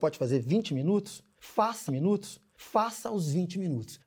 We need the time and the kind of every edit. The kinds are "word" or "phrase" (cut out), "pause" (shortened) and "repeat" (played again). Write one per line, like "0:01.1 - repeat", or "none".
0:01.9 - repeat